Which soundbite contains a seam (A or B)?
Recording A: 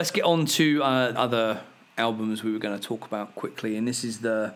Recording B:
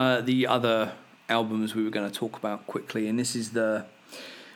A